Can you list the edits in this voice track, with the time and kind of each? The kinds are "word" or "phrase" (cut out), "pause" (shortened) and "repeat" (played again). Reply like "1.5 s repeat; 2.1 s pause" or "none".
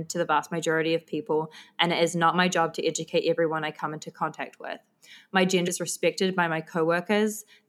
5.7 s word